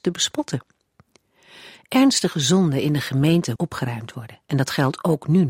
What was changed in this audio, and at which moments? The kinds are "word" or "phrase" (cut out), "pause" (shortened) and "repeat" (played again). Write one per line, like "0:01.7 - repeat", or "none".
0:03.6 - word
0:04.4 - pause